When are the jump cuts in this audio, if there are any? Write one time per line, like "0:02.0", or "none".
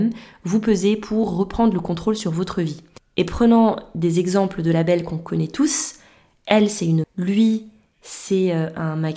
0:07.0